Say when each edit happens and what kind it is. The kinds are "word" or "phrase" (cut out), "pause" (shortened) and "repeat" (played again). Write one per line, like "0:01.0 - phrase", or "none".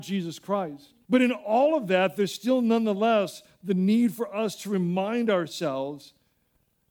0:01.0 - pause